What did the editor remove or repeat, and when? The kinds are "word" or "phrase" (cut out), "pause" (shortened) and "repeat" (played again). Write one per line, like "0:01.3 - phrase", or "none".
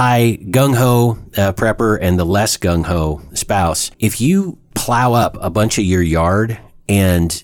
0:03.9 - pause